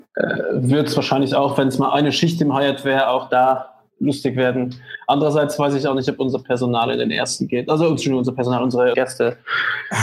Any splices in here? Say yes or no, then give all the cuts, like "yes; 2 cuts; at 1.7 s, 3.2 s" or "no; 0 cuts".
yes; 1 cut; at 8.9 s